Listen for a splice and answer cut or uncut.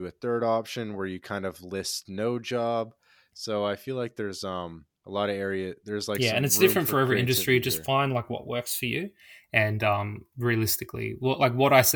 cut